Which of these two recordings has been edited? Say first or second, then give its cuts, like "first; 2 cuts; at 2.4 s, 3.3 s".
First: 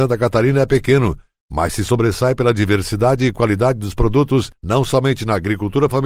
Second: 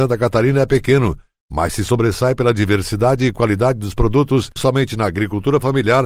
second; 1 cut; at 4.6 s